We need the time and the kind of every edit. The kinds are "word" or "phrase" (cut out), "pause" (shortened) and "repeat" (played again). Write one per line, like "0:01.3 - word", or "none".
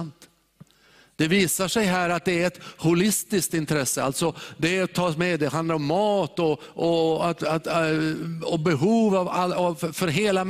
none